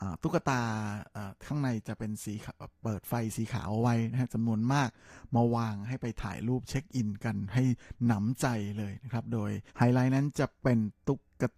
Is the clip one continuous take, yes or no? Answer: no